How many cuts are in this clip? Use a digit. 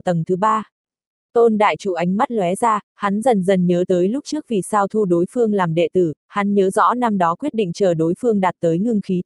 0